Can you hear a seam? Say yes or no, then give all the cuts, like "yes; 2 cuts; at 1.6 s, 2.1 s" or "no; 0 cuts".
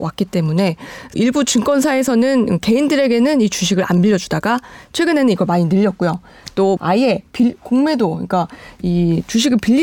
yes; 2 cuts; at 1.1 s, 6.8 s